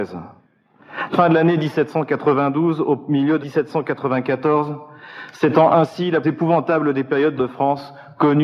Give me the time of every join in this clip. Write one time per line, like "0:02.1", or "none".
0:01.1
0:03.4
0:06.2
0:07.4